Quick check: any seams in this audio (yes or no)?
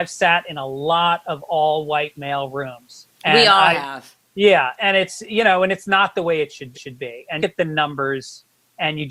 yes